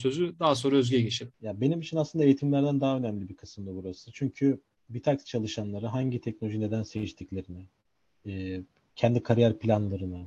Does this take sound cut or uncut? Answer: uncut